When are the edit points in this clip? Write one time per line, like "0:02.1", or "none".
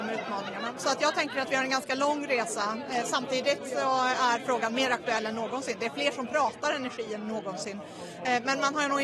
none